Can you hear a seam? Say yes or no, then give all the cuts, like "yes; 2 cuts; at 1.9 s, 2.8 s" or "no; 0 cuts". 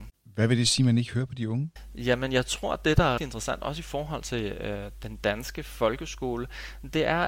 yes; 1 cut; at 3.2 s